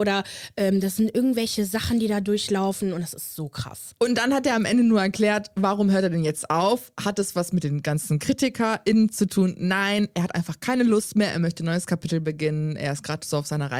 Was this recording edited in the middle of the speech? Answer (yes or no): no